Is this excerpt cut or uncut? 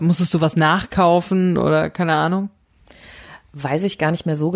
uncut